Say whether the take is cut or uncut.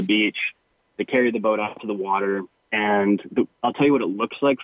cut